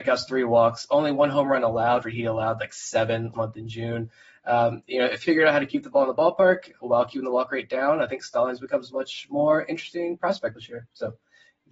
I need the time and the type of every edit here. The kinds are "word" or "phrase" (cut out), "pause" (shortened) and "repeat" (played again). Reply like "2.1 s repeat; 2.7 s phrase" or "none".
2.0 s word; 3.3 s word; 5.2 s word; 10.6 s word